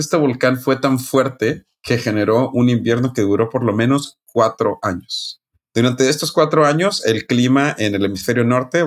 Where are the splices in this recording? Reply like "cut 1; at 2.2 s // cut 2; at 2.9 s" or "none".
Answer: none